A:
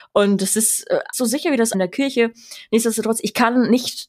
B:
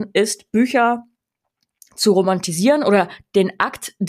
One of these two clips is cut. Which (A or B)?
A